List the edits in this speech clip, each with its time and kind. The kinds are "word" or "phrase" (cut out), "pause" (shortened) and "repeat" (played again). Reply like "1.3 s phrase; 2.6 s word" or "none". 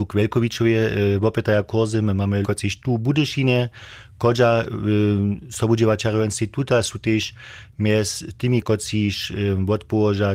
2.4 s word